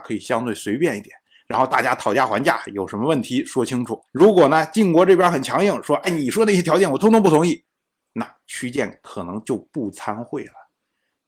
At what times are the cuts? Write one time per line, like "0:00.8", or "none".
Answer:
0:04.1